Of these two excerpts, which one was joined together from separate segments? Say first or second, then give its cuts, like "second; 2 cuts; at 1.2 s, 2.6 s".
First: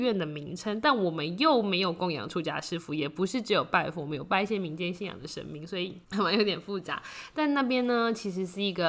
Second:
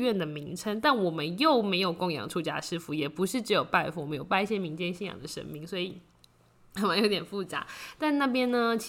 first; 1 cut; at 6.0 s